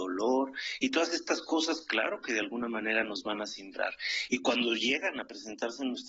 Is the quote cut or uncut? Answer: uncut